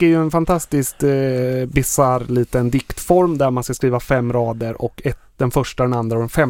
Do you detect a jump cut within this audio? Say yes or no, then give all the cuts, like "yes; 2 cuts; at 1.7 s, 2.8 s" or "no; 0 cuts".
no; 0 cuts